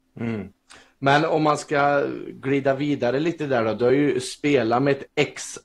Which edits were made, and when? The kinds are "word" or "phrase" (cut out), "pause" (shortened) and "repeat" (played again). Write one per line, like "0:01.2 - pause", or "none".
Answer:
none